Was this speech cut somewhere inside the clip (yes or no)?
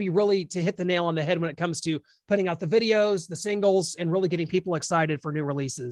no